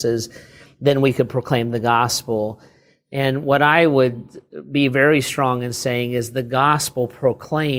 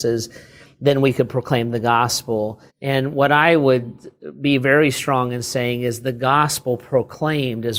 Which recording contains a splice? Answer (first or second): second